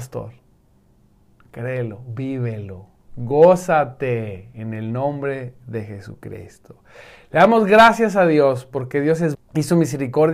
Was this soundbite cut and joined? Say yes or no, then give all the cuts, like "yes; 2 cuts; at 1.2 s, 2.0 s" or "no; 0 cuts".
yes; 1 cut; at 9.3 s